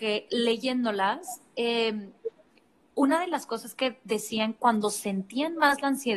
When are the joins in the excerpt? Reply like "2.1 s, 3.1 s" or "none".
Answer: none